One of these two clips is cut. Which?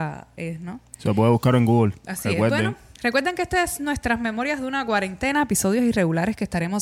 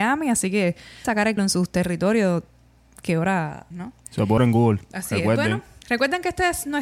second; 4 cuts; at 1.0 s, 1.4 s, 3.7 s, 4.4 s

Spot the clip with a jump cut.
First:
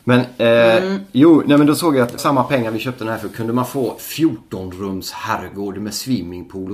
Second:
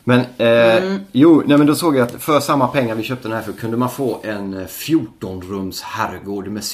first; 2 cuts; at 2.2 s, 4.0 s

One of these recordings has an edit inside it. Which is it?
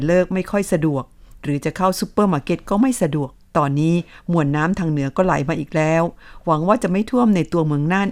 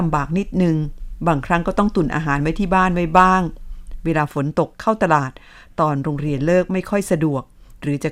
first; 1 cut; at 3.4 s

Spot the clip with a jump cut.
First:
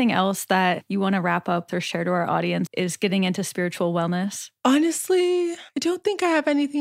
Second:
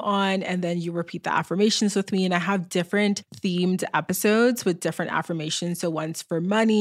first; 2 cuts; at 1.7 s, 2.7 s

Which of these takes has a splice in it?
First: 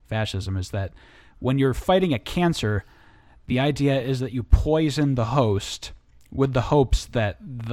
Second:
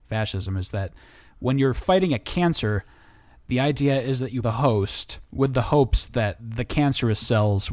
second; 3 cuts; at 4.4 s, 5.3 s, 6.4 s

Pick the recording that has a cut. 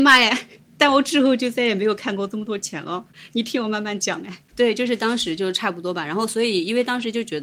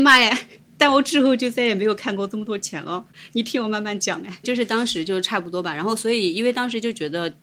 second; 1 cut; at 4.4 s

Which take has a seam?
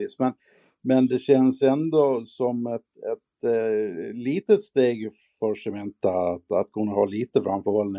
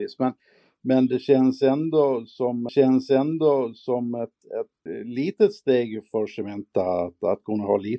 second; 3 cuts; at 2.7 s, 4.9 s, 6.1 s

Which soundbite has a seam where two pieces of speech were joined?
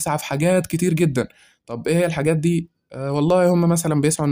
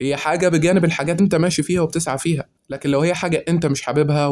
second; 1 cut; at 1.2 s

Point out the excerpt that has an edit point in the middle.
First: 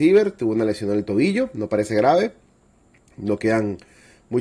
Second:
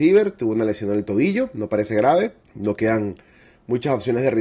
second; 1 cut; at 2.4 s

